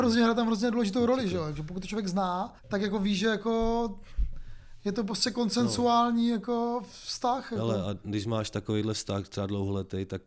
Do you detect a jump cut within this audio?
yes; 1 cut; at 2.6 s

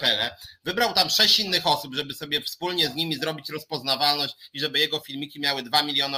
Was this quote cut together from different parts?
no; 0 cuts

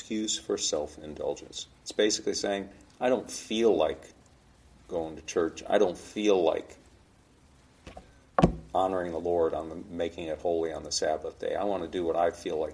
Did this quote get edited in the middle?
no; 0 cuts

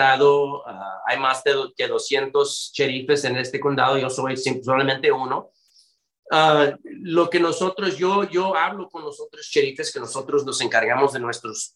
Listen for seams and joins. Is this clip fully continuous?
yes; 0 cuts

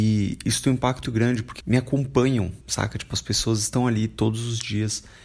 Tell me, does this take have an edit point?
yes; 3 cuts; at 1.0 s, 1.6 s, 2.6 s

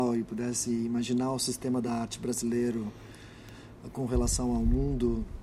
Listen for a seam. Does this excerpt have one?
no; 0 cuts

